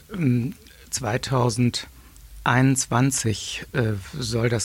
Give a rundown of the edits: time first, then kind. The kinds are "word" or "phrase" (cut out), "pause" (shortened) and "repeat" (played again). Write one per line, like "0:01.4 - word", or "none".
none